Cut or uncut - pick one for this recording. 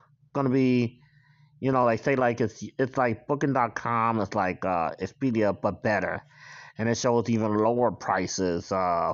uncut